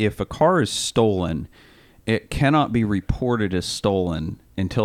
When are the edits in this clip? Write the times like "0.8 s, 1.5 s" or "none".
none